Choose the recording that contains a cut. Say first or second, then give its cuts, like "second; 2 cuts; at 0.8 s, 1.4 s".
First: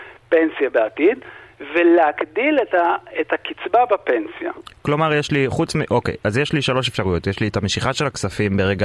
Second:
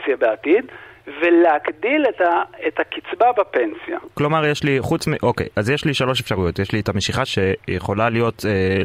second; 2 cuts; at 4.1 s, 7.3 s